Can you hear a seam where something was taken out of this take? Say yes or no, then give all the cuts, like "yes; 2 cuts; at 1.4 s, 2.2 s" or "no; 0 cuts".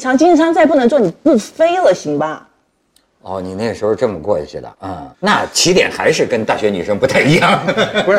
yes; 2 cuts; at 4.7 s, 5.1 s